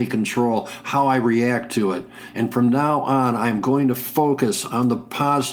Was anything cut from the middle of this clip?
no; 0 cuts

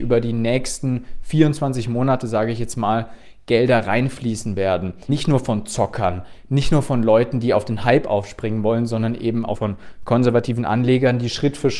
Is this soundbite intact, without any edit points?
no; 2 cuts; at 5.1 s, 9.5 s

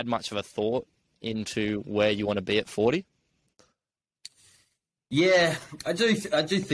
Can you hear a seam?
no; 0 cuts

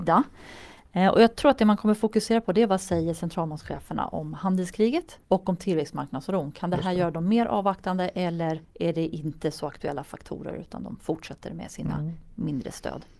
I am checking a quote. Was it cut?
yes; 2 cuts; at 5.2 s, 8.6 s

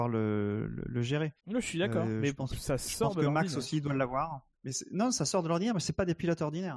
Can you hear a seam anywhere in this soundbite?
yes; 2 cuts; at 1.4 s, 4.5 s

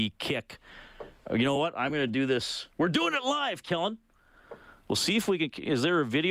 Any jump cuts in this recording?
no; 0 cuts

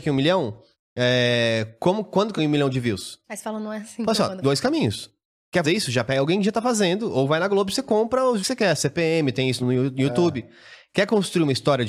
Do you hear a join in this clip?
yes; 6 cuts; at 2.4 s, 3.2 s, 4.4 s, 5.6 s, 8.4 s, 9.6 s

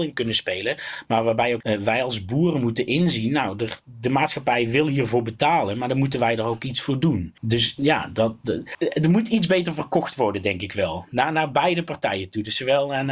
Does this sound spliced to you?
yes; 1 cut; at 1.6 s

